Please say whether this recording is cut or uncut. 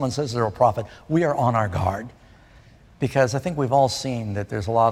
uncut